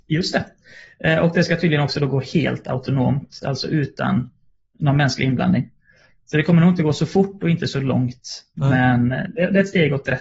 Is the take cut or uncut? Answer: uncut